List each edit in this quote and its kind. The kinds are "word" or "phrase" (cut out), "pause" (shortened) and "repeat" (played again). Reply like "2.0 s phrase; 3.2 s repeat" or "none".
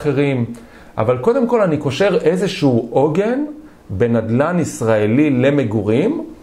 none